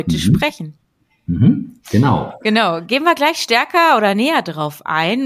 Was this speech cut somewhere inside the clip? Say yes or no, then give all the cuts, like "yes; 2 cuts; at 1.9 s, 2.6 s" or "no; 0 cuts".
no; 0 cuts